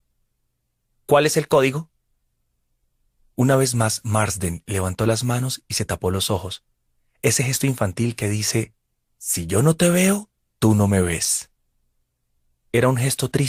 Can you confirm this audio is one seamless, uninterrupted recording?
yes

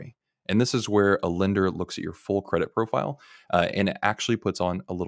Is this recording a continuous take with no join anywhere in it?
yes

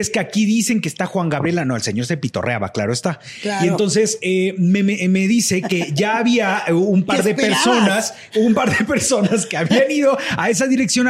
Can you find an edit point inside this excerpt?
no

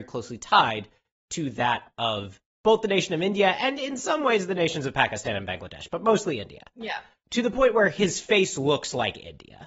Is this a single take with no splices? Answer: yes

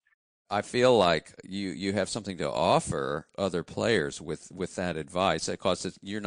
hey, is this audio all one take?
yes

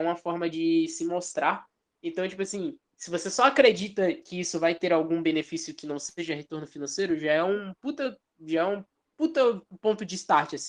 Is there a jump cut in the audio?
no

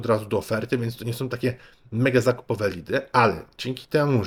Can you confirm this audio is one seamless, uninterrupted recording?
yes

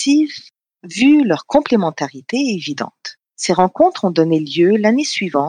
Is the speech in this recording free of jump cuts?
no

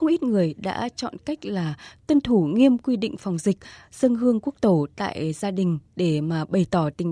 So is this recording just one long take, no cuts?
yes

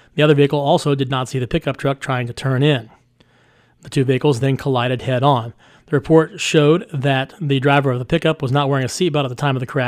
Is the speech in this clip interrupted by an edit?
no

